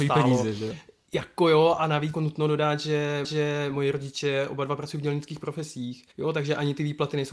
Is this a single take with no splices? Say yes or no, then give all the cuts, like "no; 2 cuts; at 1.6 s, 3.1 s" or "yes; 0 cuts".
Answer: no; 3 cuts; at 2.1 s, 3.2 s, 6.1 s